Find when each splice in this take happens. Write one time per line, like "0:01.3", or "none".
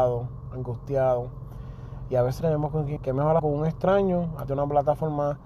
0:02.4
0:03.0
0:03.4
0:04.5